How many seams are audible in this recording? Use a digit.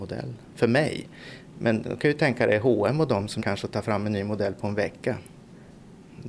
1